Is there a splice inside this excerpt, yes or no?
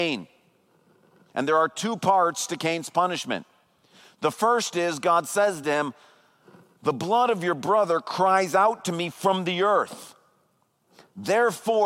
no